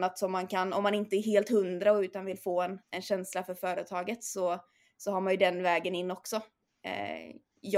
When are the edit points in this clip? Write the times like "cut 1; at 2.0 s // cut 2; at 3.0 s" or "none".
cut 1; at 2.8 s